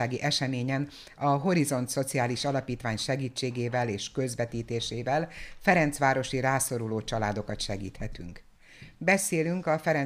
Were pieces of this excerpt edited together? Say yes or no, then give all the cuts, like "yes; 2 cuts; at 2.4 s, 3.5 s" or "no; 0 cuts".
no; 0 cuts